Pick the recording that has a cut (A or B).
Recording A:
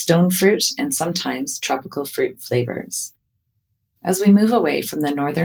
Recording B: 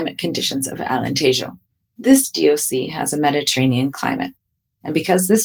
B